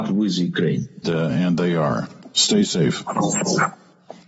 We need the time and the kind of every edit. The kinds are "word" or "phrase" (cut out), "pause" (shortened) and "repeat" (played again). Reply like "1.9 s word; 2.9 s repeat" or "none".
1.0 s word